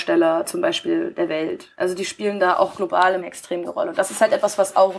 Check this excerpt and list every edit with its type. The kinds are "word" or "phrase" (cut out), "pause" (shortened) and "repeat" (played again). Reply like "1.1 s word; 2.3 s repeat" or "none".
1.7 s pause; 3.2 s word; 3.6 s word

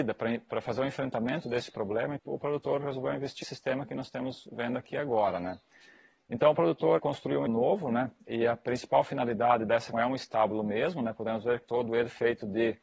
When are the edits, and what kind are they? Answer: 2.2 s word; 3.4 s word; 7.0 s word; 7.5 s word; 9.9 s word; 11.6 s word

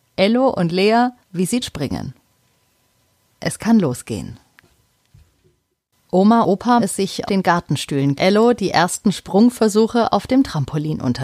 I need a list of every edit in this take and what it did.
1.2 s pause; 1.6 s word; 6.4 s word; 6.8 s word; 7.3 s word; 8.2 s phrase

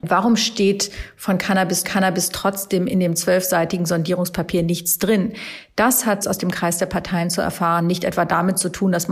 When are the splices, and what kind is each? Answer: 1.8 s repeat; 6.2 s word

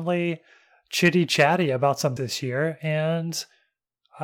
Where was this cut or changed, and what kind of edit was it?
2.2 s word

